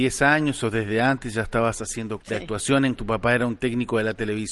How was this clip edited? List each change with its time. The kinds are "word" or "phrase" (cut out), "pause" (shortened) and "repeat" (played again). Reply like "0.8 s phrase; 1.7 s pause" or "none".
2.2 s word; 3.0 s word